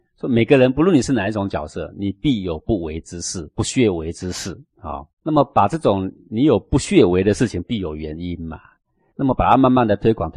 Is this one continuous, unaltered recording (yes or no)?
no